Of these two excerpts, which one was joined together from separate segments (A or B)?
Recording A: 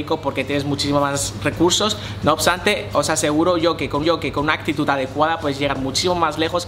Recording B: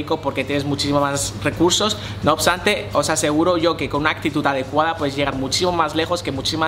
A